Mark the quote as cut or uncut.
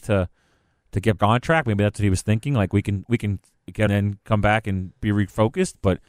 cut